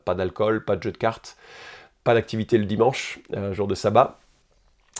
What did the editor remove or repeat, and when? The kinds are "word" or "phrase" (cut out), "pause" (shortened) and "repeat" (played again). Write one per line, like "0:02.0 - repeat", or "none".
none